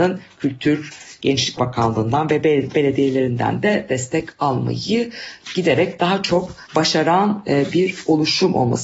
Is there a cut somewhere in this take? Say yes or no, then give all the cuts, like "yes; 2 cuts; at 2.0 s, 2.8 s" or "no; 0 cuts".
yes; 2 cuts; at 1.6 s, 6.7 s